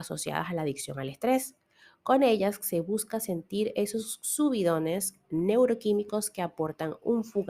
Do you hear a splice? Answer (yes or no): no